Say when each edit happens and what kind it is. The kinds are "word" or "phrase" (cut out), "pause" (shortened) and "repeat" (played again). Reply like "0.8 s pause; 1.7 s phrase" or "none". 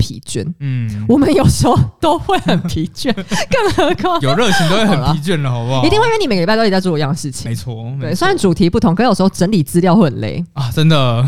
4.2 s word